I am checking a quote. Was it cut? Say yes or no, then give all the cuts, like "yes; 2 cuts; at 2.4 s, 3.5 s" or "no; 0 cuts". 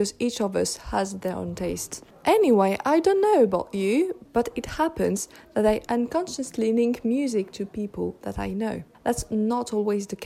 no; 0 cuts